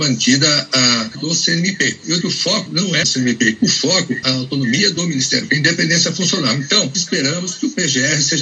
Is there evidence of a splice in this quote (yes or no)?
yes